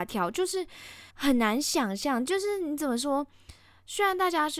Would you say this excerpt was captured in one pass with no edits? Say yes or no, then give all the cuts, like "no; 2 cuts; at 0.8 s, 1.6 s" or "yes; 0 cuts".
no; 1 cut; at 1.1 s